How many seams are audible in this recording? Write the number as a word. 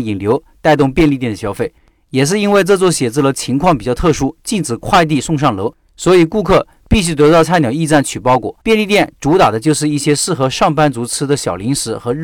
one